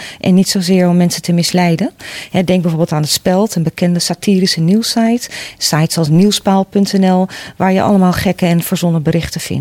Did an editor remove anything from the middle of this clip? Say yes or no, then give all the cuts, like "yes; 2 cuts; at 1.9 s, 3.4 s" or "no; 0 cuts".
no; 0 cuts